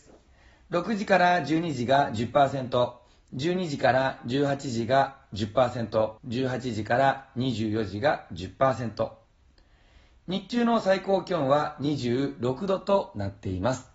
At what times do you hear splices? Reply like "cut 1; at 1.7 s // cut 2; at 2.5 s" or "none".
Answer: cut 1; at 6.2 s